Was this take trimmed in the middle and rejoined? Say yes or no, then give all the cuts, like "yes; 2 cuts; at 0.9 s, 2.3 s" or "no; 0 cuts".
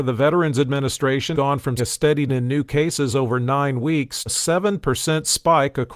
yes; 4 cuts; at 1.3 s, 1.8 s, 2.3 s, 4.3 s